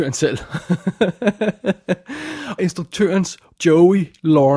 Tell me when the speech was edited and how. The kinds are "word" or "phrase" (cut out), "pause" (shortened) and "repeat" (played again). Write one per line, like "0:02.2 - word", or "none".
0:02.6 - word
0:03.6 - word